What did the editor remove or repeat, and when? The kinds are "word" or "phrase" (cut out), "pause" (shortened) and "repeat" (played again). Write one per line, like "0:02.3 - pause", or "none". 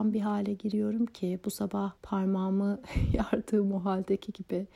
0:02.0 - pause